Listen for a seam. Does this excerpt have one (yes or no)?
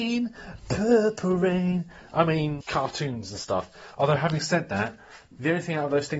yes